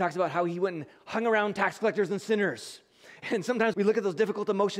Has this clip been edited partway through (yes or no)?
yes